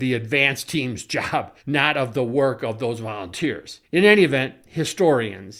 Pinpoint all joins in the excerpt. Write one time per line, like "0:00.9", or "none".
0:01.6
0:03.8